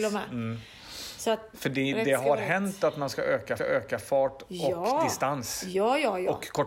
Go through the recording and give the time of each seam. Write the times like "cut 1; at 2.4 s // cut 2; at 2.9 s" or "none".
cut 1; at 1.5 s // cut 2; at 3.6 s